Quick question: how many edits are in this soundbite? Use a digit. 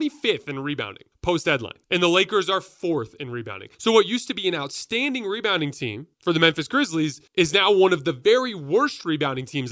5